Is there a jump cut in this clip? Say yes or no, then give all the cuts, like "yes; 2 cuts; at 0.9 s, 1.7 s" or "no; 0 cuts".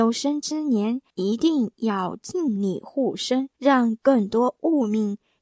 yes; 2 cuts; at 1.1 s, 3.5 s